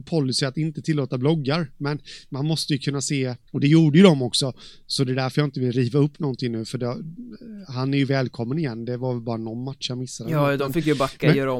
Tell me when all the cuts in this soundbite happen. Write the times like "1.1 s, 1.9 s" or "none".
3.5 s